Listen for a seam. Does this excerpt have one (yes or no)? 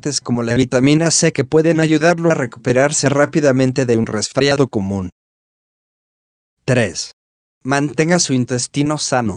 no